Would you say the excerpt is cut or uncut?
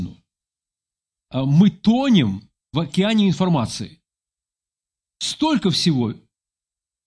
uncut